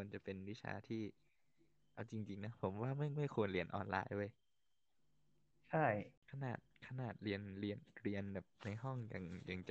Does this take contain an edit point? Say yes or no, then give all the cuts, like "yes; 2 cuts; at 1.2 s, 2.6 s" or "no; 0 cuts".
no; 0 cuts